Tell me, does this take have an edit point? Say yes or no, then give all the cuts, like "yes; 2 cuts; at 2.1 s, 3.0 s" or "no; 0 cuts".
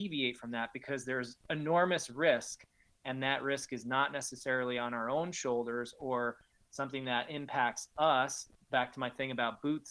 no; 0 cuts